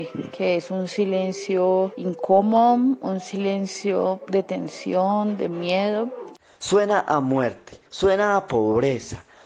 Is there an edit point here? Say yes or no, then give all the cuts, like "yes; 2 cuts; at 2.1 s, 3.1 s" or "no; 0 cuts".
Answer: yes; 1 cut; at 7.9 s